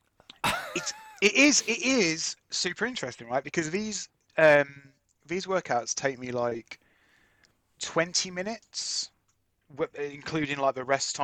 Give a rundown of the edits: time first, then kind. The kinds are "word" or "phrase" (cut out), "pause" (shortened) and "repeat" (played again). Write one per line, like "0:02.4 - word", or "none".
none